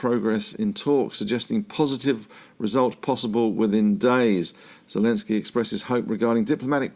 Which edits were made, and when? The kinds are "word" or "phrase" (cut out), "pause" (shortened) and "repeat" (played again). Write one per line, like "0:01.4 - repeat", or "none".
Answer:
none